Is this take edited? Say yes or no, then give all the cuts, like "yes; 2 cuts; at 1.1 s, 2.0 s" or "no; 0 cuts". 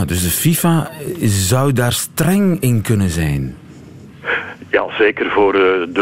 no; 0 cuts